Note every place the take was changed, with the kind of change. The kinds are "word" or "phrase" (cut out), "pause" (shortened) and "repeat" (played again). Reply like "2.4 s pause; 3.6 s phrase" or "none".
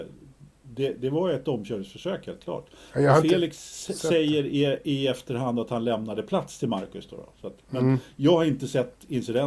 none